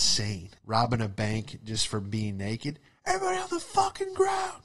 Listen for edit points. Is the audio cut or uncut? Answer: uncut